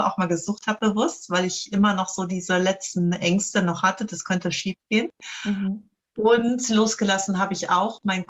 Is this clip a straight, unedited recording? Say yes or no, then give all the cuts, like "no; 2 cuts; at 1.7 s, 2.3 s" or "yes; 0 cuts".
yes; 0 cuts